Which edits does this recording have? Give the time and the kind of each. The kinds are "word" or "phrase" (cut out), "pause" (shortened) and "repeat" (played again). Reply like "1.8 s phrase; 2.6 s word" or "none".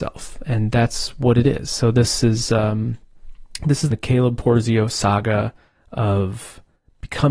3.9 s phrase